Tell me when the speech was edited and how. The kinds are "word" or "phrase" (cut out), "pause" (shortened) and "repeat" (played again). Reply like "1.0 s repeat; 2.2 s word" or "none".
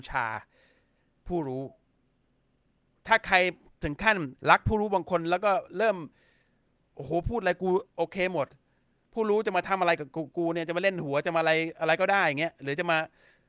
4.4 s pause; 7.9 s pause